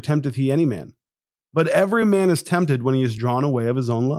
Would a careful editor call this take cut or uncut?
uncut